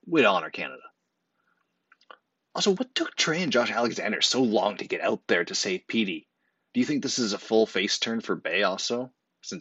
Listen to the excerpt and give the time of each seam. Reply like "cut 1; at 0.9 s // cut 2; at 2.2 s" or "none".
none